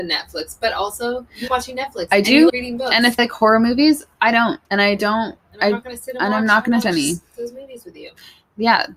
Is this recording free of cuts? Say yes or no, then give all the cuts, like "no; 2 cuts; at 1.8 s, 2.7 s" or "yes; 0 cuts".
no; 5 cuts; at 1.5 s, 2.5 s, 3.2 s, 4.6 s, 6.8 s